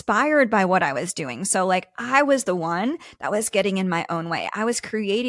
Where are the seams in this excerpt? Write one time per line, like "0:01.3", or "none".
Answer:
none